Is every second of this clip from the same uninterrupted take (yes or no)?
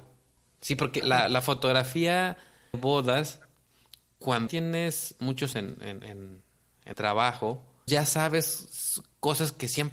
no